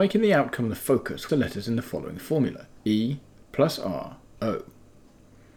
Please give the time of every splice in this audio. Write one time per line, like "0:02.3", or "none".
0:01.3
0:02.8
0:04.4